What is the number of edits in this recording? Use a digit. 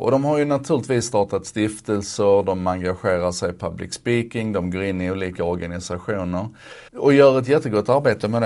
1